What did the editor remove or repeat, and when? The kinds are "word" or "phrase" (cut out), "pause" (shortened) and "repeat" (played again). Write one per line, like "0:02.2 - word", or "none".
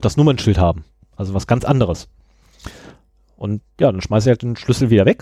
none